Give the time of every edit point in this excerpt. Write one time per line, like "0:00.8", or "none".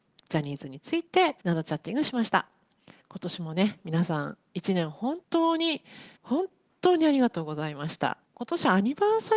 0:01.4
0:03.0
0:05.2
0:06.2
0:08.2